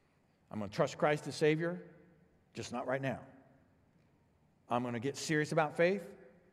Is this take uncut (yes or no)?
yes